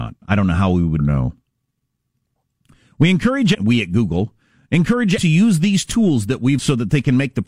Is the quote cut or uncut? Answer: cut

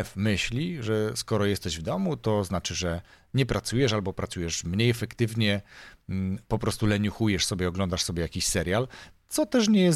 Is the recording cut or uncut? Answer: uncut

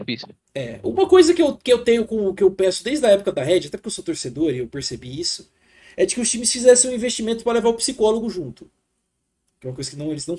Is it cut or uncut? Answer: uncut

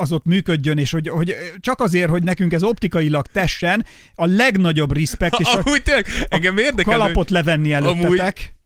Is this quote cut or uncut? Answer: uncut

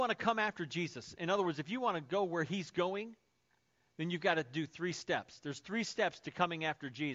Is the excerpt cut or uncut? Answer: uncut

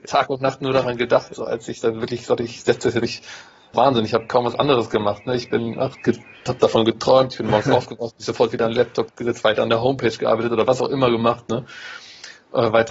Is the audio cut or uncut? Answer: cut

